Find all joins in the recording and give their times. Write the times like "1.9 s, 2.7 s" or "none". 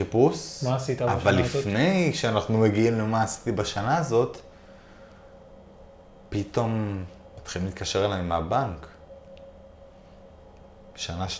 none